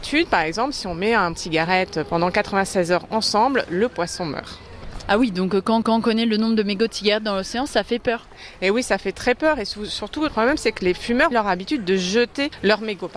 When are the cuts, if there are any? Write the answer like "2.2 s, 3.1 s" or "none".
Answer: 1.4 s, 5.8 s, 10.3 s, 11.3 s

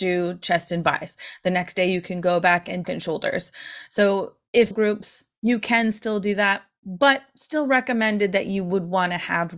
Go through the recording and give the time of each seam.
2.8 s, 4.7 s

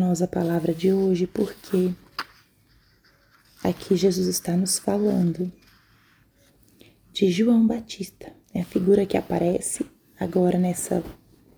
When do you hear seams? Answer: 8.4 s

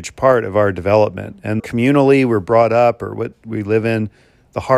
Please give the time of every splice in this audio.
1.6 s

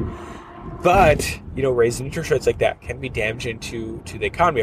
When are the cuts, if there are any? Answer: none

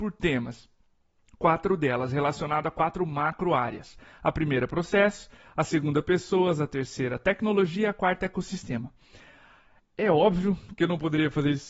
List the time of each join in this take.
none

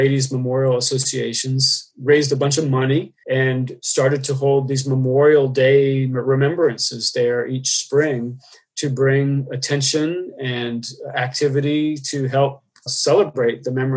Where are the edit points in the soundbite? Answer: none

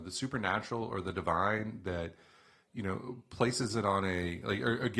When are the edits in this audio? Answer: none

